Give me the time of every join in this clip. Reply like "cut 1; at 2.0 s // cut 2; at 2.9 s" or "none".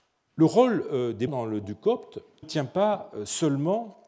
cut 1; at 1.3 s // cut 2; at 1.6 s // cut 3; at 2.4 s